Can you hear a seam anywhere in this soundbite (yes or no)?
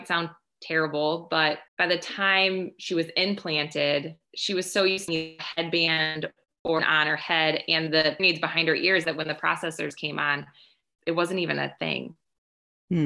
yes